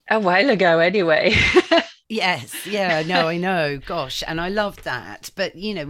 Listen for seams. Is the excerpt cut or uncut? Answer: cut